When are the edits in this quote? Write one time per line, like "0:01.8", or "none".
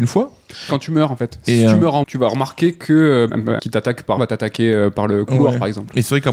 0:02.0
0:03.3
0:03.6
0:04.2